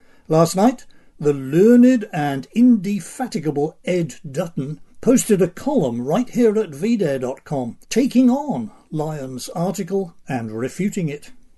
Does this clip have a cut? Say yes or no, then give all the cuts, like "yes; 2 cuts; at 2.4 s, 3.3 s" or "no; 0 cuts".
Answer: yes; 3 cuts; at 4.9 s, 7.8 s, 10.2 s